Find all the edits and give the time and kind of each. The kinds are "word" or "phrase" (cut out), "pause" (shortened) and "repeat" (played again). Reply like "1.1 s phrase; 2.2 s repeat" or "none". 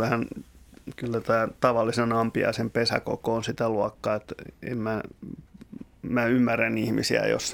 none